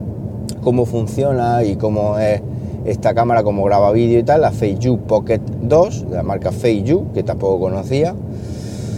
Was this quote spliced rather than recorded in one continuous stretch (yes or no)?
no